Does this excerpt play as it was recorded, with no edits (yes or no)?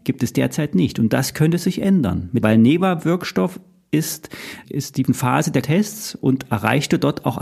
no